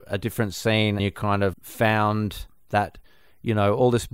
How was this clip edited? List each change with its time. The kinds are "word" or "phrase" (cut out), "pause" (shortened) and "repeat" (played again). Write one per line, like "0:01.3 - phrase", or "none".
0:01.0 - word
0:01.5 - word